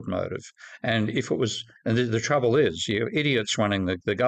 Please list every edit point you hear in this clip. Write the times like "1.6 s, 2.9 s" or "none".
none